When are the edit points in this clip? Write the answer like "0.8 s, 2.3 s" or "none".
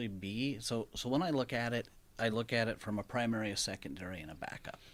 none